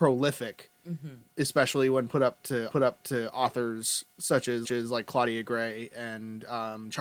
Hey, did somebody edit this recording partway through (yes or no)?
yes